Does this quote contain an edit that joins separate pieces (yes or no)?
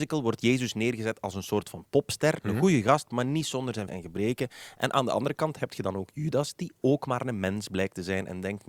yes